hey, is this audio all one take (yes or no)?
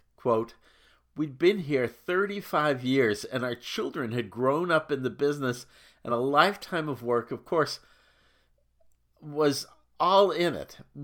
yes